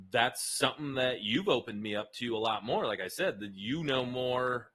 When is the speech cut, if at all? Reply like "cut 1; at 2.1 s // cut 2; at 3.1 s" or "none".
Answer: none